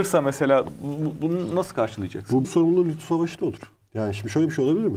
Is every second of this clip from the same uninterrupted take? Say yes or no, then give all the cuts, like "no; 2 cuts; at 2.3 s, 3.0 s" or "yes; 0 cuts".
no; 2 cuts; at 2.4 s, 3.8 s